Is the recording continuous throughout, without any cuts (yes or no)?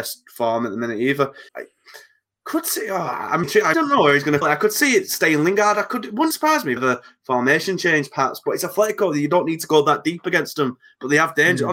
no